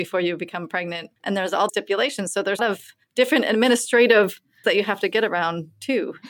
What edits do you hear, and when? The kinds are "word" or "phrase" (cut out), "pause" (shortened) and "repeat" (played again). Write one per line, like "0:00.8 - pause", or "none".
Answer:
0:01.2 - pause
0:01.7 - word
0:02.6 - phrase
0:03.0 - pause
0:04.6 - word